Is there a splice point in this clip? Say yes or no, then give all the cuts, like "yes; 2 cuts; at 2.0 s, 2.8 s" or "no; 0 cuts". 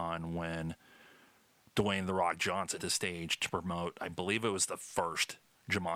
yes; 1 cut; at 2.8 s